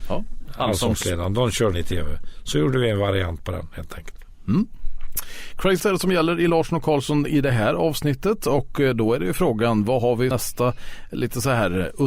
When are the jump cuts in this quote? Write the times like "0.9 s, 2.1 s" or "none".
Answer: 1.7 s, 5.8 s, 10.3 s